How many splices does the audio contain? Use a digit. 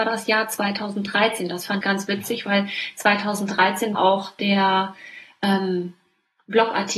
2